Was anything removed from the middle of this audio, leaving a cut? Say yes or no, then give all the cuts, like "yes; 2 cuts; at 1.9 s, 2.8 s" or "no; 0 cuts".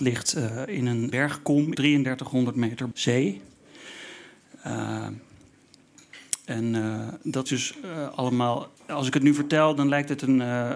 yes; 5 cuts; at 1.1 s, 1.7 s, 2.9 s, 7.5 s, 8.8 s